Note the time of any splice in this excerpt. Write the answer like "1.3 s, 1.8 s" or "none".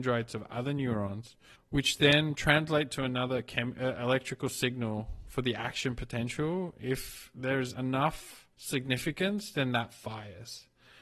1.5 s, 8.5 s